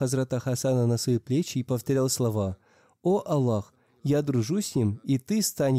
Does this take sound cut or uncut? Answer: uncut